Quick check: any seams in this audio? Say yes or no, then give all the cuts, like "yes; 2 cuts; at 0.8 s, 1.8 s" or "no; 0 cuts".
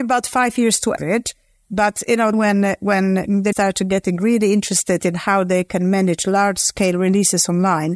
yes; 3 cuts; at 1.0 s, 2.3 s, 3.5 s